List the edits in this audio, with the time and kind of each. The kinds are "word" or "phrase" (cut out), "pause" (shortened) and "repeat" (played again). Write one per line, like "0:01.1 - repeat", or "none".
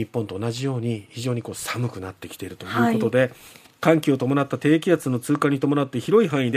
none